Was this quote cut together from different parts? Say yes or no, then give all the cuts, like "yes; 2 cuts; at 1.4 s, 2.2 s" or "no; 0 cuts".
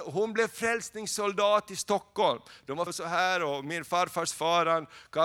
yes; 1 cut; at 2.9 s